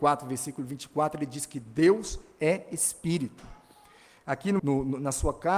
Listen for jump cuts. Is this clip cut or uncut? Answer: cut